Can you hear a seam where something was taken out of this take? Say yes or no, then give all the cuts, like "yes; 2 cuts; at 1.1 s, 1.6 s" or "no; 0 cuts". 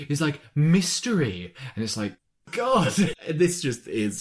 no; 0 cuts